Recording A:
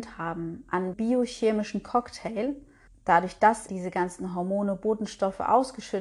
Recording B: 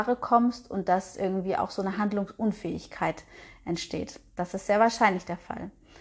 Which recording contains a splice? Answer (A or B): A